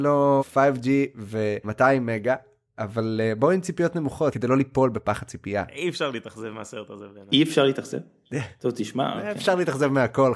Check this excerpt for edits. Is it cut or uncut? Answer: uncut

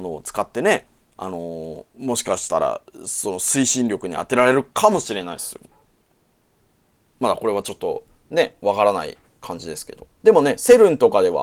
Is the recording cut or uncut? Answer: cut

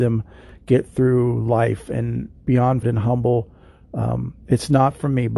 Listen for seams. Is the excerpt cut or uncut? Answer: cut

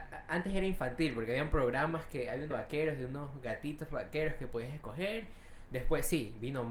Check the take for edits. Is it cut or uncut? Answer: cut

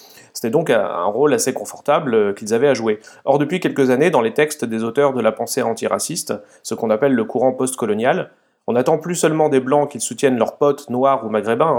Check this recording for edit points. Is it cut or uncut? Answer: uncut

